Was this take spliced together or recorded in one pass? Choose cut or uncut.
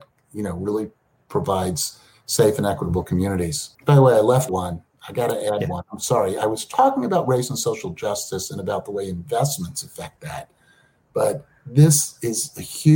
cut